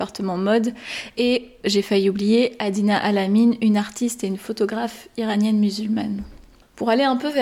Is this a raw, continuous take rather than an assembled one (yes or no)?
yes